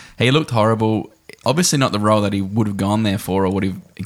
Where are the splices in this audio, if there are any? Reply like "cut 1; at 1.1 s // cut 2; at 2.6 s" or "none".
none